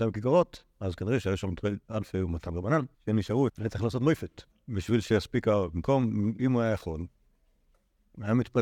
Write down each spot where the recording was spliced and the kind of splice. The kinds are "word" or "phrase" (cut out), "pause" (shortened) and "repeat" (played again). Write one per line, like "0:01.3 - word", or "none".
0:02.9 - pause
0:03.5 - phrase
0:04.5 - pause